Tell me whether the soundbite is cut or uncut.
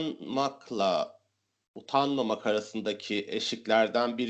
uncut